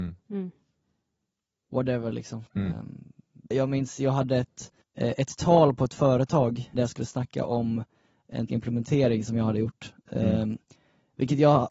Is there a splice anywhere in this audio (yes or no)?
yes